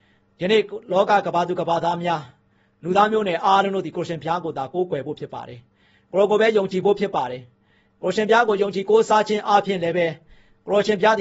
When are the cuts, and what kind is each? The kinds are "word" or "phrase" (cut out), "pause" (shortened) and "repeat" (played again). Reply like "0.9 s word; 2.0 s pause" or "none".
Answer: none